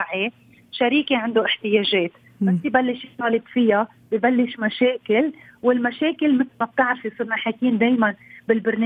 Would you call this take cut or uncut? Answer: uncut